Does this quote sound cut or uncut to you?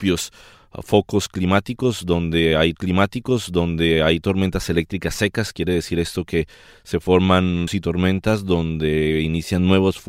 cut